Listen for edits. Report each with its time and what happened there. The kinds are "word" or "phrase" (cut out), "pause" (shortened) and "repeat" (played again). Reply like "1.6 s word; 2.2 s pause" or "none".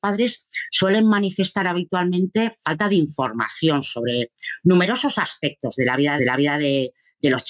6.2 s repeat